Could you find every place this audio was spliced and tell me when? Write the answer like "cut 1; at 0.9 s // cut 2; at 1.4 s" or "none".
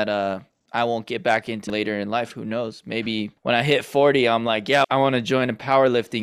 cut 1; at 1.7 s // cut 2; at 3.4 s // cut 3; at 4.8 s